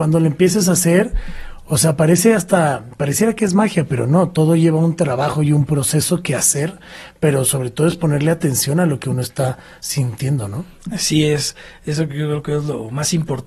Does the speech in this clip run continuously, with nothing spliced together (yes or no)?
yes